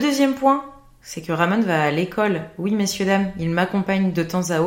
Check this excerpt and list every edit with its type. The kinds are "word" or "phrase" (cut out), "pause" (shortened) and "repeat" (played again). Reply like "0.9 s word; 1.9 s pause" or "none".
none